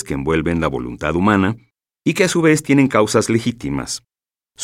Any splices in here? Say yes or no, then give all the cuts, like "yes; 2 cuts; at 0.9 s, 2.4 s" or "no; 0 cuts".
no; 0 cuts